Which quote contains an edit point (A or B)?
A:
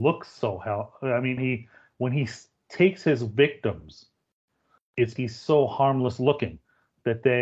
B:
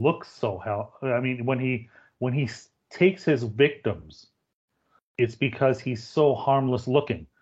A